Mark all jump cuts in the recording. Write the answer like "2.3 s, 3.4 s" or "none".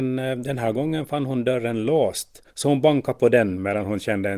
2.5 s